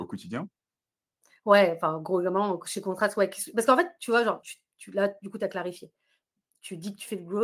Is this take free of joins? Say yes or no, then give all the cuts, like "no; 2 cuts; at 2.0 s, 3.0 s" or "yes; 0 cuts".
no; 1 cut; at 4.4 s